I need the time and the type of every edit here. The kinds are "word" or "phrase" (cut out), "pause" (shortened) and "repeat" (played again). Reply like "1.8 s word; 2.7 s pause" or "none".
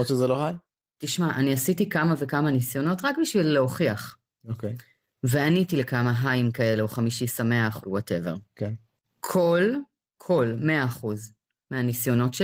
7.8 s phrase